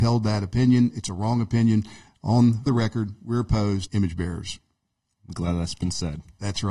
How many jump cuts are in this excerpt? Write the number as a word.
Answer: two